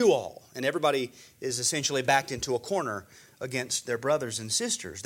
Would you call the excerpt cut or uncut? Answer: uncut